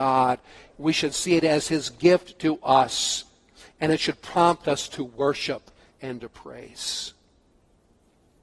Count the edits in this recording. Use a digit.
0